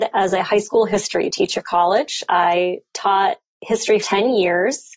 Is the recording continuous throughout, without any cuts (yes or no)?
no